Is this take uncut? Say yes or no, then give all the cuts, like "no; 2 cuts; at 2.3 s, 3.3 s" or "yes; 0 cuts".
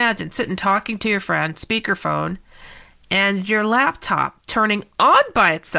yes; 0 cuts